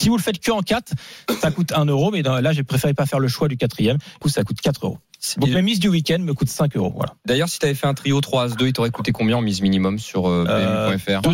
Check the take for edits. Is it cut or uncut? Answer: cut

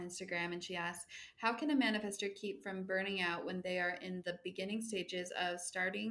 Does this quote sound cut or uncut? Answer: uncut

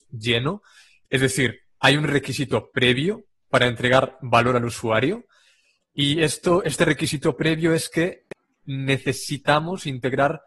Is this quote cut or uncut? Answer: uncut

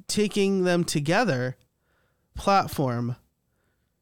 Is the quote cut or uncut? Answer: cut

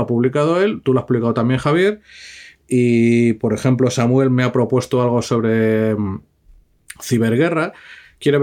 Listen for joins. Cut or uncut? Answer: uncut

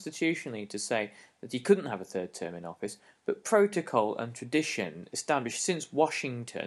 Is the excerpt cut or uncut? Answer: uncut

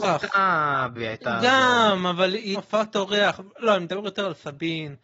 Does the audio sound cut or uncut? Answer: cut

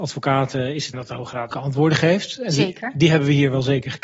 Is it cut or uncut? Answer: cut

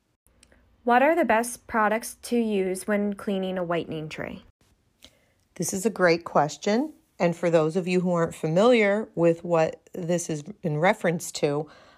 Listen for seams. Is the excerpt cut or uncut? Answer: uncut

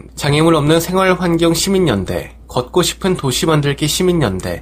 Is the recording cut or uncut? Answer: uncut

